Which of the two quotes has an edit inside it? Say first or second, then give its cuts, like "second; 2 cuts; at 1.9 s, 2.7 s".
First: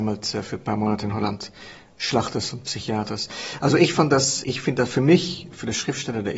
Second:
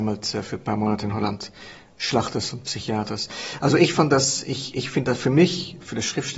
first; 1 cut; at 4.4 s